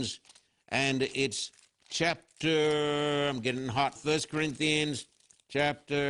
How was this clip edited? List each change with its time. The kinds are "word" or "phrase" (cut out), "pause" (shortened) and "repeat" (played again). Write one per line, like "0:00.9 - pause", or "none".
0:04.0 - word